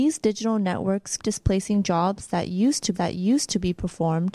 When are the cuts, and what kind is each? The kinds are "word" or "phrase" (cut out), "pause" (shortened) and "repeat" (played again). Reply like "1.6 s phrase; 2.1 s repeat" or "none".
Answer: 1.2 s word; 2.9 s repeat